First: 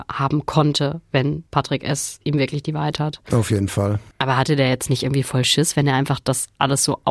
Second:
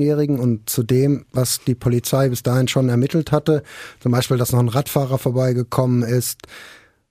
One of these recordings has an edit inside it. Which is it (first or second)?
first